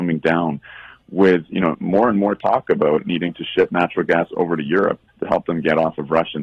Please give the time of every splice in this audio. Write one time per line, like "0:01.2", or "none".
0:05.1